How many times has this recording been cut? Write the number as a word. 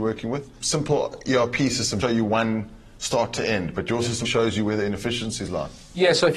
two